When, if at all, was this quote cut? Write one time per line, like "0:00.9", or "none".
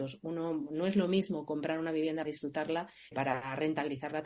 0:02.2
0:03.1

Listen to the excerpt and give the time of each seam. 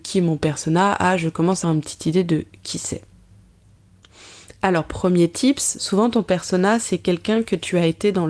0:01.6

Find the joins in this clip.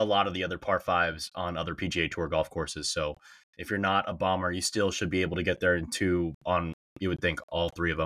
none

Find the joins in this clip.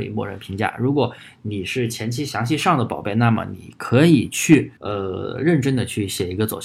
0:04.8

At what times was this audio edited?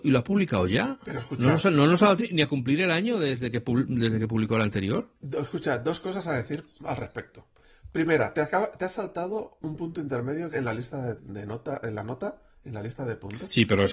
0:02.2
0:10.5
0:11.2

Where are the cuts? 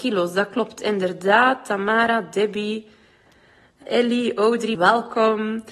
0:03.8
0:04.7

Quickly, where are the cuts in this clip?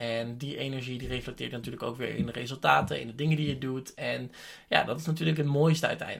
none

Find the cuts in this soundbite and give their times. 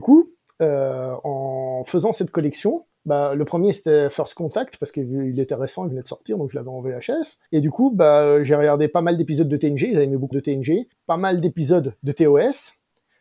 0:02.9
0:07.5
0:10.3
0:10.9

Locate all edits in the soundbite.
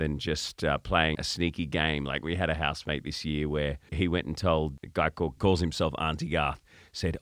0:01.1
0:03.9
0:05.4

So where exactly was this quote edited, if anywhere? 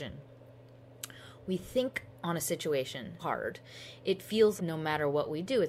0:03.2
0:04.6

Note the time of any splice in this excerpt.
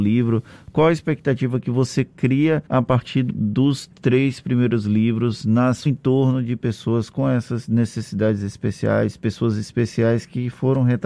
0:02.7
0:03.3
0:05.9

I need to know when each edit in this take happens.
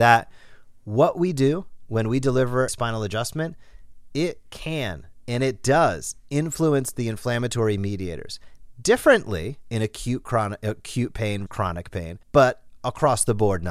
0:02.7
0:11.5
0:12.2

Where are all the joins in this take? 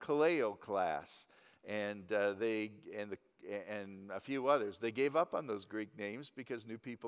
none

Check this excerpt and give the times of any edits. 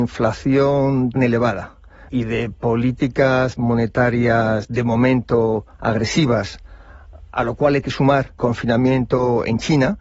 0:01.2
0:02.1
0:07.8
0:08.4

